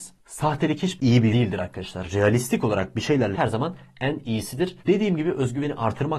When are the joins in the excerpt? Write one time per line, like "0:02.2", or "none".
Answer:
0:01.0
0:01.3
0:03.3
0:04.8